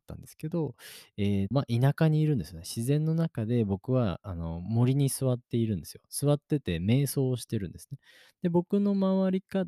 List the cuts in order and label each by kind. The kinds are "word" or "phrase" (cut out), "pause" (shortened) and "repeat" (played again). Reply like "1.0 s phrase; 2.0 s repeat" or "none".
1.5 s word